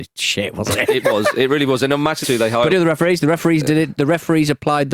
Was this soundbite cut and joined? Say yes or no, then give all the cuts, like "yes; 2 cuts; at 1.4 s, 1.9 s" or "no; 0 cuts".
yes; 2 cuts; at 2.2 s, 2.7 s